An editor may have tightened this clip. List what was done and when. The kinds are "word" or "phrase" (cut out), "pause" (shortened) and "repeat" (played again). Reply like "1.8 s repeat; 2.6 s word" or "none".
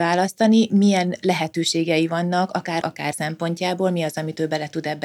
2.8 s word; 3.1 s word